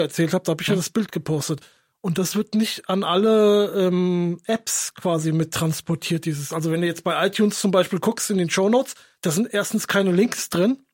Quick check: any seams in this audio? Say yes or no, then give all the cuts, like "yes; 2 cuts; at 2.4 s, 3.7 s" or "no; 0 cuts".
no; 0 cuts